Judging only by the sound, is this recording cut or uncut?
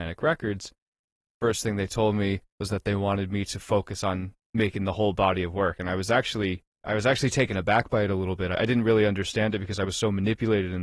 cut